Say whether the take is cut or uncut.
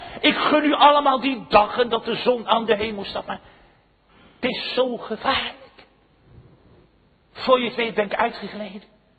uncut